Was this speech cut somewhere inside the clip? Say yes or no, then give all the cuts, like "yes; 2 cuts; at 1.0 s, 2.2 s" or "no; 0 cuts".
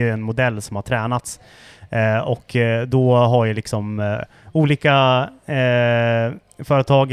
no; 0 cuts